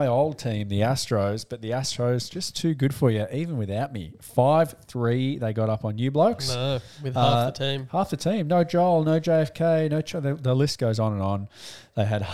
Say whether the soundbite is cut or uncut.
uncut